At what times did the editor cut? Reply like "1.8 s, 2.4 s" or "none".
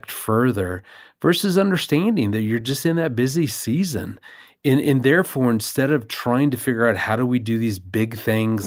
none

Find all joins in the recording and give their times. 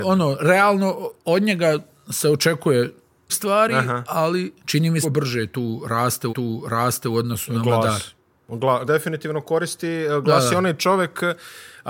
1.2 s, 3.3 s, 4.6 s, 5.0 s, 6.3 s, 8.9 s

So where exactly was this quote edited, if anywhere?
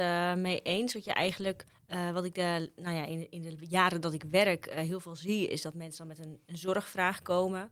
1.7 s

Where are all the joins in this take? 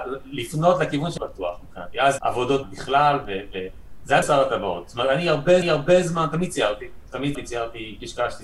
1.2 s, 2.2 s, 2.6 s, 4.2 s, 5.6 s, 7.3 s

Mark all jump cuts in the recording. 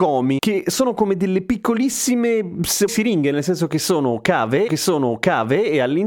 2.9 s, 4.7 s

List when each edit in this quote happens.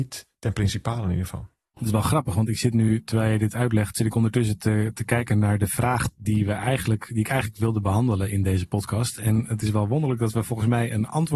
none

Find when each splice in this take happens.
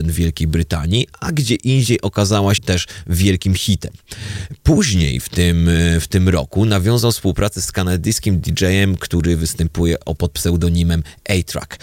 2.6 s, 10.2 s

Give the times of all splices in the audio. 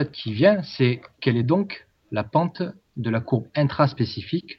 none

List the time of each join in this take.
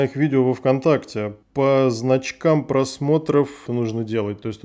1.4 s, 3.7 s

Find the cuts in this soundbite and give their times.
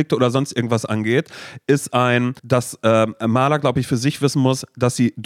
2.4 s

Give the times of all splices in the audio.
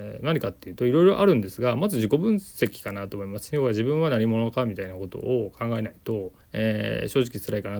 6.4 s

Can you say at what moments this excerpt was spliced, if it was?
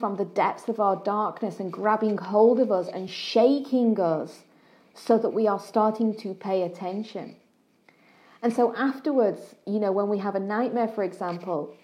none

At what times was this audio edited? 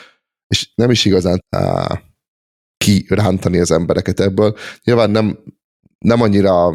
1.4 s

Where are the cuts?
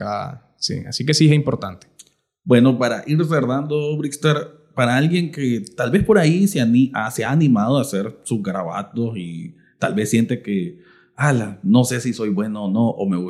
none

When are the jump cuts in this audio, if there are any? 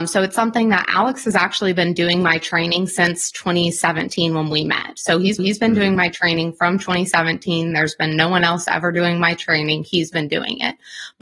5.4 s

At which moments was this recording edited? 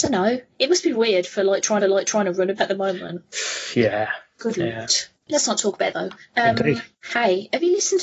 0.9 s, 1.8 s, 2.6 s, 5.9 s

